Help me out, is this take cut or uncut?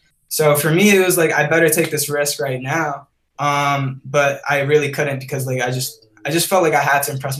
cut